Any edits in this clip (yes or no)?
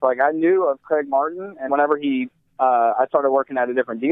yes